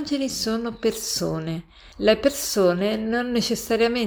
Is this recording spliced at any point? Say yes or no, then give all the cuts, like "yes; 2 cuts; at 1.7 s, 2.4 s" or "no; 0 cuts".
yes; 1 cut; at 1.9 s